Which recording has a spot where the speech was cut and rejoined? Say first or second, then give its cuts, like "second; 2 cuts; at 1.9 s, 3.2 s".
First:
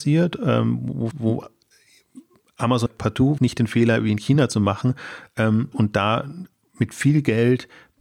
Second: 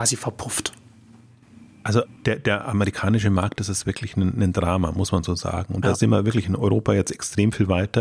first; 4 cuts; at 1.1 s, 2.9 s, 3.4 s, 5.7 s